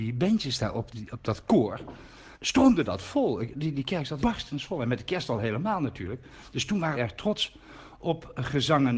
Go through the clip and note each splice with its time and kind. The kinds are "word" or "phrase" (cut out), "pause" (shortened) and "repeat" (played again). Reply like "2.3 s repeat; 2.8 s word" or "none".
0.9 s phrase; 2.3 s pause; 4.2 s word; 6.9 s phrase